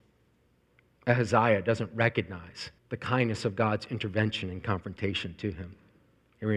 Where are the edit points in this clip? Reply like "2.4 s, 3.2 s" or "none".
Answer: 2.8 s